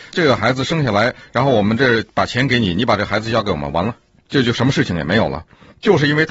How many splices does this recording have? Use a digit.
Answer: 0